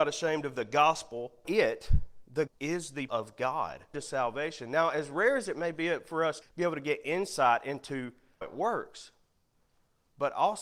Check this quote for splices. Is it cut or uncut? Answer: cut